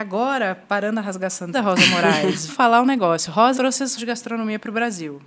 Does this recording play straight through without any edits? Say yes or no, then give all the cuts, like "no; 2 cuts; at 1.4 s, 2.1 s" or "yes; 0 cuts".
no; 4 cuts; at 1.5 s, 2.5 s, 3.5 s, 4.0 s